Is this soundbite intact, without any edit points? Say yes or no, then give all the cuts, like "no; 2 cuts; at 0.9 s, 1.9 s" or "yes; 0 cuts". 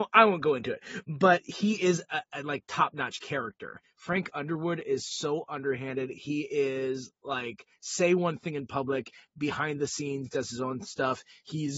yes; 0 cuts